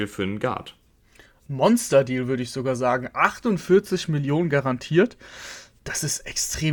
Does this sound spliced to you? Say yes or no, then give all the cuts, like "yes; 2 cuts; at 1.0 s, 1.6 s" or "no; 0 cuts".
no; 0 cuts